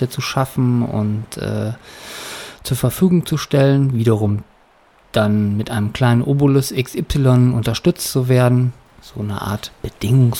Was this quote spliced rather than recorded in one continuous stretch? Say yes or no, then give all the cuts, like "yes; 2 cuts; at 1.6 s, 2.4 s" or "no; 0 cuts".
no; 0 cuts